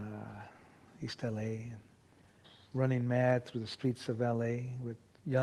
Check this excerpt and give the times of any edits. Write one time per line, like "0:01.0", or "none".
0:02.4